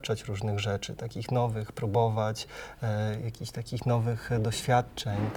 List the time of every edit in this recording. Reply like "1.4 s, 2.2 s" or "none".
none